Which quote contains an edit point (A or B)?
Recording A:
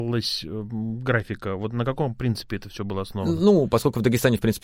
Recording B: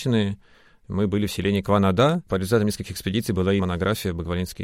B